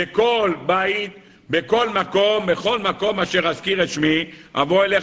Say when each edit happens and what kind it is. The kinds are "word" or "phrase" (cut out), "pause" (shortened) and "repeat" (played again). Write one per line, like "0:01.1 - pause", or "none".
none